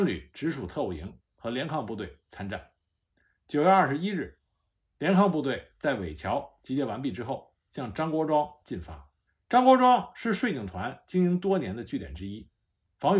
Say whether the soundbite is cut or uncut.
cut